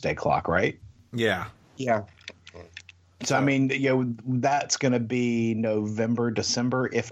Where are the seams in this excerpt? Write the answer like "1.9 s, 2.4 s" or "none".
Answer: none